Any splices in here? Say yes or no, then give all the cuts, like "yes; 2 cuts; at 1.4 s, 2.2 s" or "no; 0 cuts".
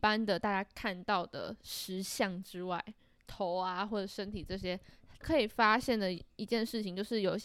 no; 0 cuts